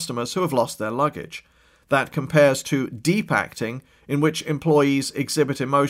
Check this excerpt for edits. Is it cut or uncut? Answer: uncut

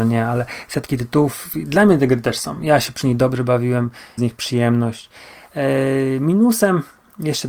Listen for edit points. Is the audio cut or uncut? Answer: cut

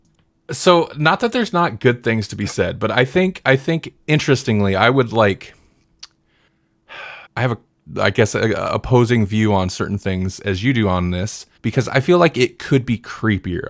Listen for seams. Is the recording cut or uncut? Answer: cut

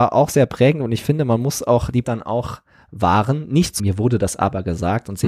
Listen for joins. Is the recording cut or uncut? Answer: cut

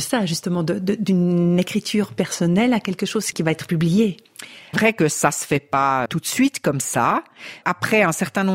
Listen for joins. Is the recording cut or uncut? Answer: cut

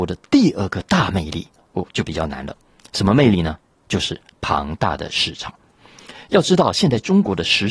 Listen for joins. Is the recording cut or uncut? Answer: uncut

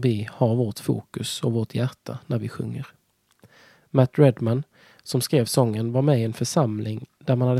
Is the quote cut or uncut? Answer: uncut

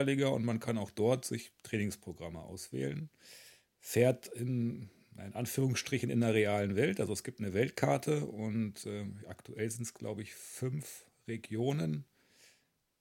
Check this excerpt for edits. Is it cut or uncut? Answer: uncut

